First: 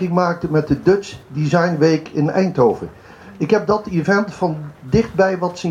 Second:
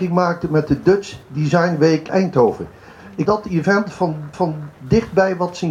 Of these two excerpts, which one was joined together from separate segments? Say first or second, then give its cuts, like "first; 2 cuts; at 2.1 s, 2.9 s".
second; 3 cuts; at 2.1 s, 3.3 s, 4.3 s